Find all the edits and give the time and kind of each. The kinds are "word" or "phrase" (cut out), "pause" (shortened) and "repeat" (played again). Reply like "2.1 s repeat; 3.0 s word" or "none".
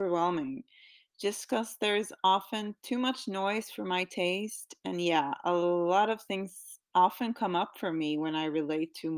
none